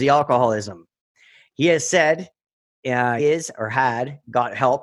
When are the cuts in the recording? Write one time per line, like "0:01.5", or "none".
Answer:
0:03.2